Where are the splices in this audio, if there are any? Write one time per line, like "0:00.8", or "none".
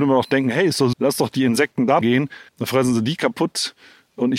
0:00.9
0:02.0
0:02.5